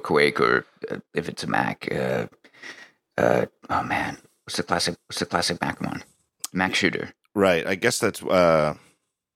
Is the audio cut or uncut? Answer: cut